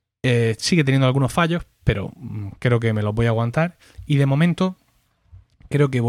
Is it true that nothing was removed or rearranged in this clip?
yes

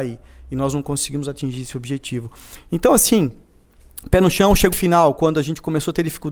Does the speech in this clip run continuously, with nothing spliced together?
no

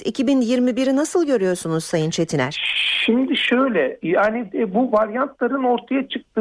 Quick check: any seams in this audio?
no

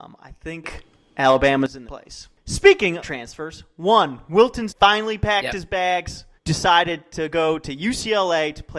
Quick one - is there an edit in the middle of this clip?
yes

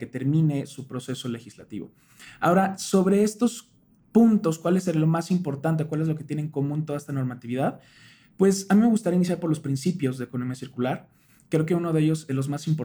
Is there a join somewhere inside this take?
no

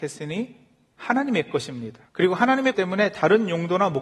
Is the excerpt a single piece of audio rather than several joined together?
no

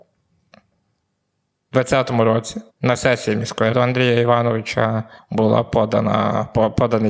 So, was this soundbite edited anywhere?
yes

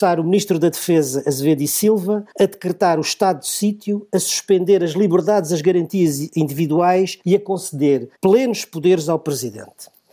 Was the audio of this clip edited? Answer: yes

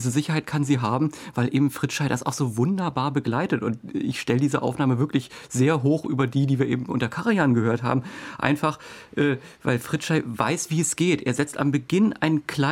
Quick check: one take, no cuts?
yes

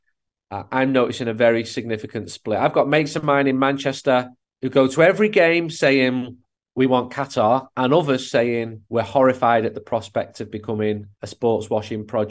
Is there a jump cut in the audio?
yes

